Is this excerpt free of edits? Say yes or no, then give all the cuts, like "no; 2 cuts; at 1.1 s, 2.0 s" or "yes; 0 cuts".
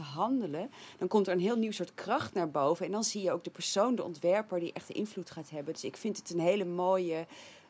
yes; 0 cuts